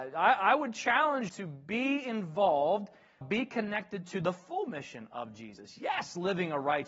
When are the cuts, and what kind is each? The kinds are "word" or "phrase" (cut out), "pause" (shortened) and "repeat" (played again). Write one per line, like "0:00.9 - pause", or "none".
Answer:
0:01.3 - word
0:03.2 - word